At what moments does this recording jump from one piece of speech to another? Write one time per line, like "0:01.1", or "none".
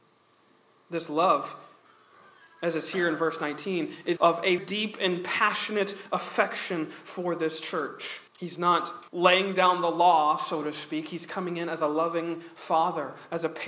0:04.2
0:04.6
0:08.3
0:09.1